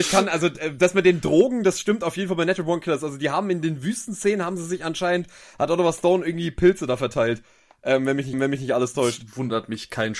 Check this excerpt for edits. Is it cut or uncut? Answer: cut